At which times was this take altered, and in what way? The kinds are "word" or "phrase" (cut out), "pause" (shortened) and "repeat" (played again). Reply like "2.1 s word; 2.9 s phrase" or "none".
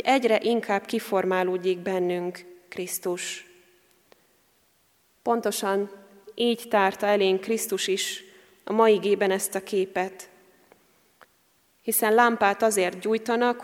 none